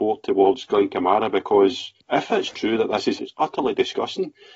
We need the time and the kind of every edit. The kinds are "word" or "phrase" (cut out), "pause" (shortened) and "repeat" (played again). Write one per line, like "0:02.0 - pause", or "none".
0:02.0 - pause
0:03.2 - word